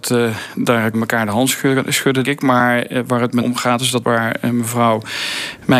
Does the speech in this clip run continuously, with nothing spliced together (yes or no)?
no